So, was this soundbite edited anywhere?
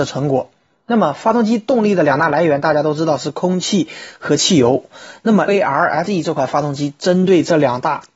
yes; 2 cuts; at 5.5 s, 6.1 s

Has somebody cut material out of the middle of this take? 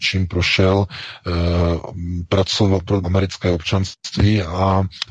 yes; 1 cut; at 3.0 s

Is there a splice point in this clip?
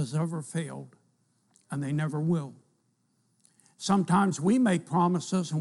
no; 0 cuts

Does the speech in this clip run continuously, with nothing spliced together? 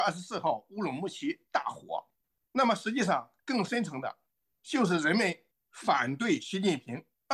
yes; 0 cuts

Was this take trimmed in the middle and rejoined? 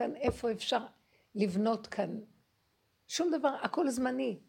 no; 0 cuts

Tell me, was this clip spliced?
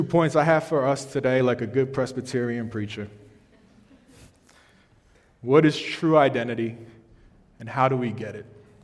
no; 0 cuts

